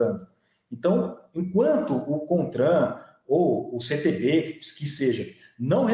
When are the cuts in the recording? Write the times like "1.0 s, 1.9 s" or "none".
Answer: none